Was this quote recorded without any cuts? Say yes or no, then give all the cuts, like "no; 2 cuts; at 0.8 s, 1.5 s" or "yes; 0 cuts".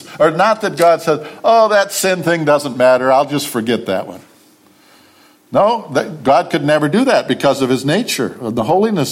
yes; 0 cuts